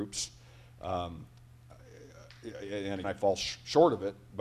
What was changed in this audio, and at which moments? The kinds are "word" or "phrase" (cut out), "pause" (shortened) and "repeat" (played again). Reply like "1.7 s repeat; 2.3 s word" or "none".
3.0 s word